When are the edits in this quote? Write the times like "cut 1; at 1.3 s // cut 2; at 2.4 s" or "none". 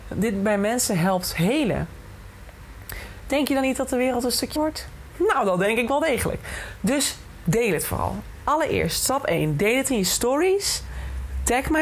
cut 1; at 4.6 s